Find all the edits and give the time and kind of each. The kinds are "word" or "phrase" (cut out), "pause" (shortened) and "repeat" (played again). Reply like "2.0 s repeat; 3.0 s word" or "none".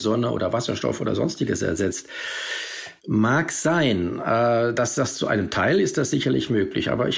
3.0 s pause